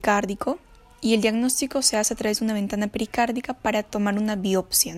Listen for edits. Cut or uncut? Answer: uncut